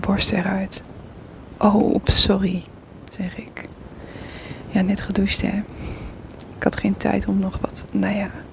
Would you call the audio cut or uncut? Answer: uncut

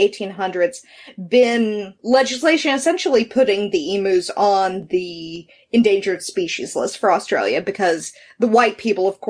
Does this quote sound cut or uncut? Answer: uncut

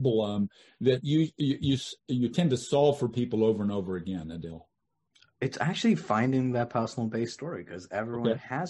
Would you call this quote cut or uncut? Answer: uncut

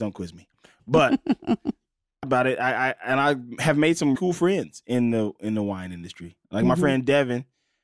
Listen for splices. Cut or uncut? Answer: cut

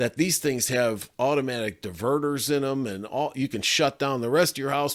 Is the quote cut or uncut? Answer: uncut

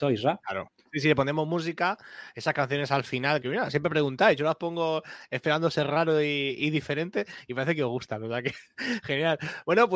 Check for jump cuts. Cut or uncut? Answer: cut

